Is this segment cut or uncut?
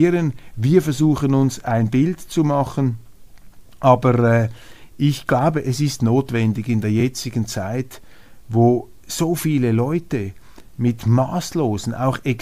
uncut